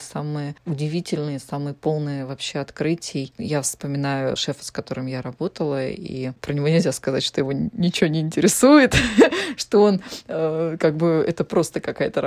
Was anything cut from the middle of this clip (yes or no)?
no